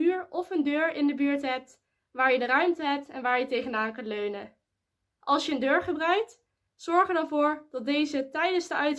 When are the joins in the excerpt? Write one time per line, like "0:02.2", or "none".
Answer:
none